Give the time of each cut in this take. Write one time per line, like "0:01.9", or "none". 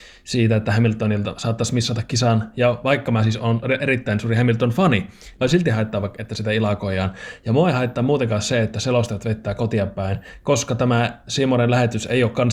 0:05.4